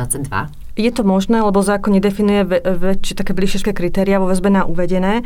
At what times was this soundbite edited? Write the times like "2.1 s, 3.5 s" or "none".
3.6 s